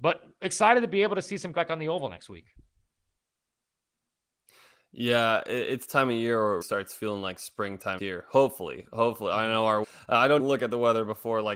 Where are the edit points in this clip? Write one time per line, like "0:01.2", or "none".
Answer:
0:01.5
0:05.9
0:06.6
0:08.0
0:09.8
0:10.4